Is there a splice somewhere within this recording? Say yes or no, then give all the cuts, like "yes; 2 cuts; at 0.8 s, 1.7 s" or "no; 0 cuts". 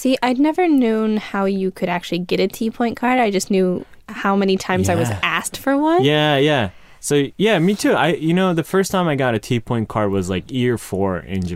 no; 0 cuts